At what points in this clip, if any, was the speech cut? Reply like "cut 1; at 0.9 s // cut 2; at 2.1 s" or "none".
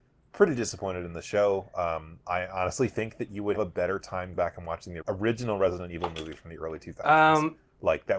cut 1; at 3.5 s // cut 2; at 4.3 s // cut 3; at 5.0 s

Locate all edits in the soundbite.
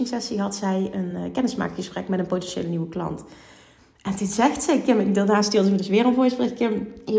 none

